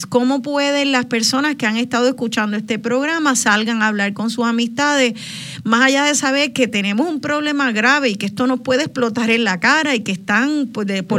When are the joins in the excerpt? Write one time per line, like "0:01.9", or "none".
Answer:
none